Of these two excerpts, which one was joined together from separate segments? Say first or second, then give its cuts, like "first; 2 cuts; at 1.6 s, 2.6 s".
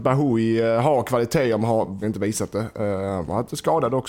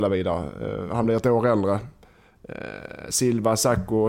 first; 1 cut; at 2.0 s